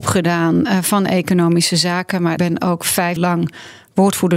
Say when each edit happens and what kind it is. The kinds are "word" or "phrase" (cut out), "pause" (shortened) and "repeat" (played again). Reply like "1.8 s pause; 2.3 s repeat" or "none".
2.4 s word; 3.2 s word